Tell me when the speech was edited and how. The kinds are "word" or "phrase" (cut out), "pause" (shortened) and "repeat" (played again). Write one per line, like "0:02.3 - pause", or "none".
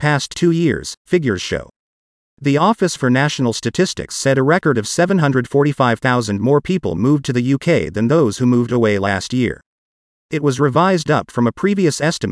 none